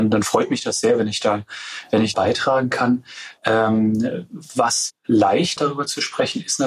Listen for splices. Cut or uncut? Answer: cut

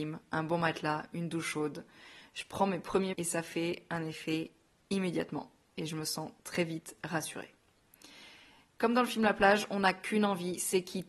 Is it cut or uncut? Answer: cut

